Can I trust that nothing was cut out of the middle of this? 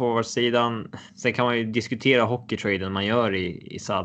no; 1 cut; at 1.1 s

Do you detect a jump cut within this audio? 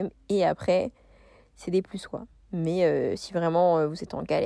no; 0 cuts

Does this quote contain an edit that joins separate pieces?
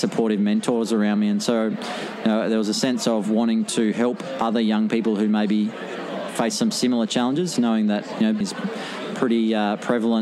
yes; 1 cut; at 8.4 s

